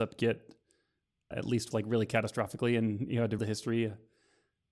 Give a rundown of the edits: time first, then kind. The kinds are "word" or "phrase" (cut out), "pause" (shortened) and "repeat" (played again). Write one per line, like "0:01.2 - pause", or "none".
0:01.3 - word
0:01.7 - word
0:03.4 - word